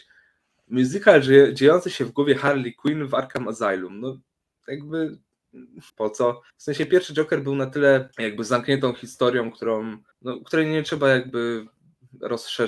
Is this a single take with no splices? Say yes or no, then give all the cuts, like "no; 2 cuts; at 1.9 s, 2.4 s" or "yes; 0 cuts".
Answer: no; 4 cuts; at 5.9 s, 6.5 s, 8.1 s, 10.1 s